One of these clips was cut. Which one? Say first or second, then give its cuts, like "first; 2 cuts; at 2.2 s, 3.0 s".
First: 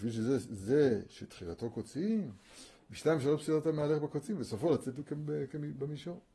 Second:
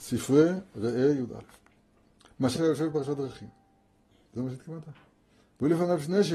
second; 1 cut; at 2.6 s